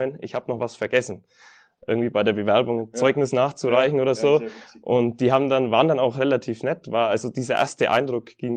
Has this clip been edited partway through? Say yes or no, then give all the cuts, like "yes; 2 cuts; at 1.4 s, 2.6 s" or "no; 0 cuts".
no; 0 cuts